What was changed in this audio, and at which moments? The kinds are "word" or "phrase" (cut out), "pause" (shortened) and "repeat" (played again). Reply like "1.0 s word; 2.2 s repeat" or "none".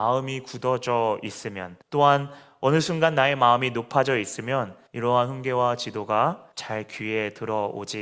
1.8 s pause; 4.9 s pause; 6.5 s pause